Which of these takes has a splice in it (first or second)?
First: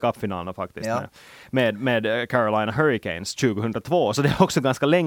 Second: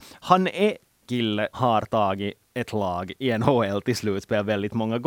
second